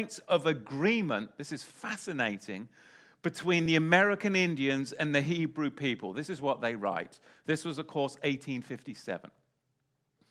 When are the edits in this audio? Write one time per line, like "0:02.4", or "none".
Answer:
none